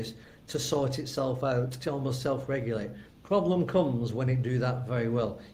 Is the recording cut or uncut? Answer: cut